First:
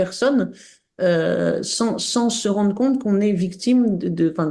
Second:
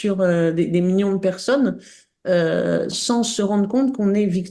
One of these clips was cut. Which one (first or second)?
second